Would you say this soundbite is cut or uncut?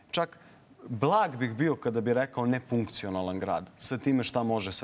uncut